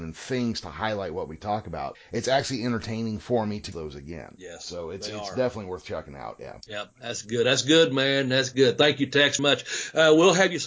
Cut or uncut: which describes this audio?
cut